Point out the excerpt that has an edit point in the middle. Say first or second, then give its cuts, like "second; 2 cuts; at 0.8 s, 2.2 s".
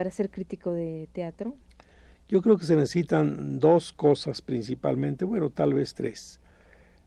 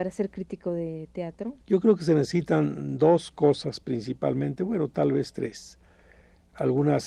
second; 1 cut; at 1.6 s